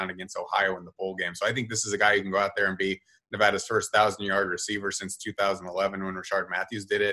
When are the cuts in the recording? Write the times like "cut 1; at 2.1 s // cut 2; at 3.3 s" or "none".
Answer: none